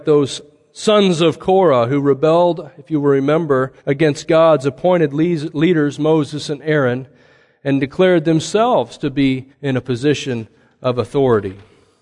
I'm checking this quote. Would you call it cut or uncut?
cut